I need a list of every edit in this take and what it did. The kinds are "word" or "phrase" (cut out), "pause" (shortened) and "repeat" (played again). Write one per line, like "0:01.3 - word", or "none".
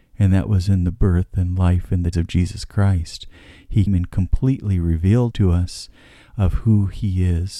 0:02.1 - word
0:03.9 - word
0:05.3 - word